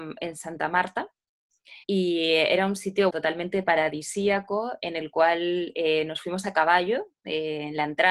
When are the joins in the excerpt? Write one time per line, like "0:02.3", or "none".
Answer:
0:01.8
0:03.1